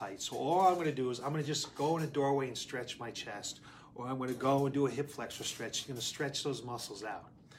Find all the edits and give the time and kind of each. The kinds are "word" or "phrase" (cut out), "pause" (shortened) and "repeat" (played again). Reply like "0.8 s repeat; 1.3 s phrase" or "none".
none